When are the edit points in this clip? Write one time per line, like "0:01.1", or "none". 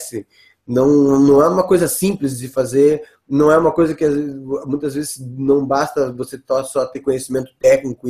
none